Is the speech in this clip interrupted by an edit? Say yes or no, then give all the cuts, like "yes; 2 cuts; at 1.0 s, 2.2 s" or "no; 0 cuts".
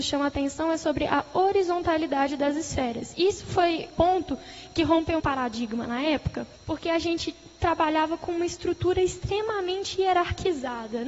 yes; 3 cuts; at 3.9 s, 5.2 s, 6.6 s